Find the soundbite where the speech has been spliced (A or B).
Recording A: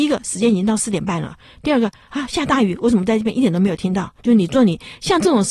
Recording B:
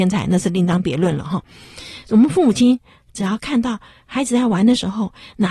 A